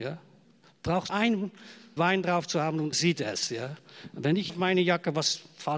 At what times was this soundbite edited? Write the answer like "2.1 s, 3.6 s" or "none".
1.1 s, 2.0 s, 2.9 s, 4.5 s

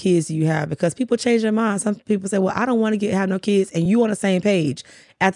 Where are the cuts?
none

